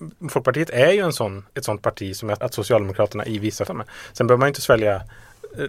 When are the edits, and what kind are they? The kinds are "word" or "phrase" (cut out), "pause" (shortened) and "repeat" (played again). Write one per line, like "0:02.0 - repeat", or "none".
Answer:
0:01.5 - pause
0:02.4 - word
0:03.7 - phrase